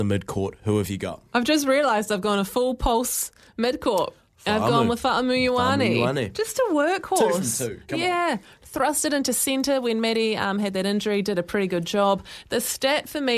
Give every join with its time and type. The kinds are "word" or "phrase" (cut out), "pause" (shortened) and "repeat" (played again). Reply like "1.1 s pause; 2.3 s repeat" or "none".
none